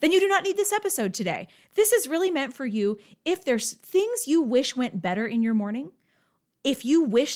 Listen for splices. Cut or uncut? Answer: uncut